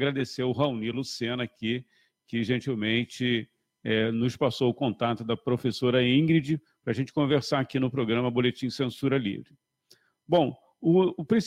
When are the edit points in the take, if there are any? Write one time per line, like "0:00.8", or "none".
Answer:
none